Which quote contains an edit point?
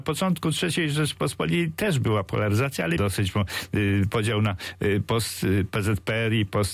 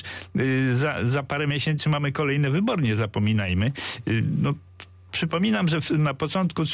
first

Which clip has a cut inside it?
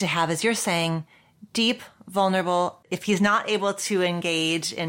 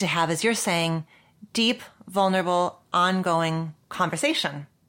first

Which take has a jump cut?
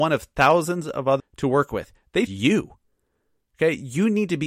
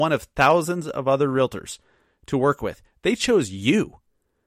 first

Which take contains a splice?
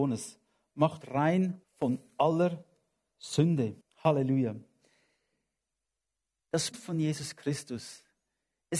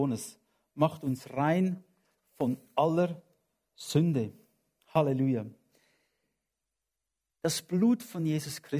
first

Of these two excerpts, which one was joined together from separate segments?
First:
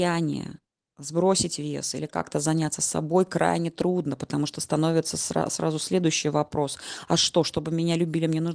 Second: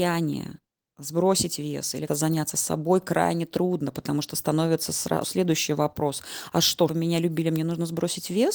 second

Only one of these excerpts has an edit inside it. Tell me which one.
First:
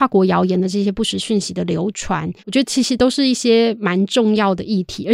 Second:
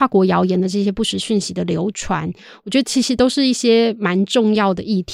first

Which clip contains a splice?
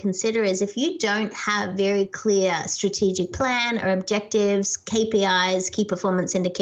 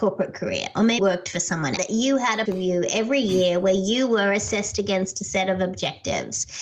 second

